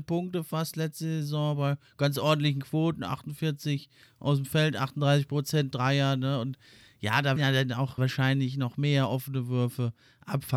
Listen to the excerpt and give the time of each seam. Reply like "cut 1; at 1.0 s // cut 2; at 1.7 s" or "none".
cut 1; at 7.4 s // cut 2; at 8.0 s